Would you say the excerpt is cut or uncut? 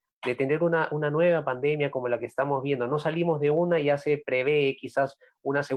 uncut